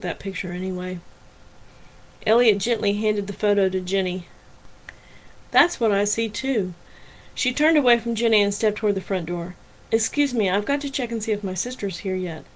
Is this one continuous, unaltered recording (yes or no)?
yes